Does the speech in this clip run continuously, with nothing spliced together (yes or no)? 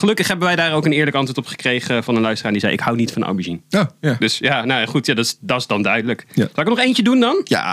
no